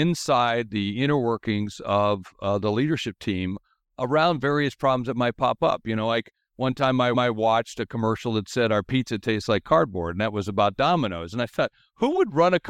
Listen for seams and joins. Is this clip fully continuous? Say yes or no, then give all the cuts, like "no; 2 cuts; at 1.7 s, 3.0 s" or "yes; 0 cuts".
no; 1 cut; at 7.1 s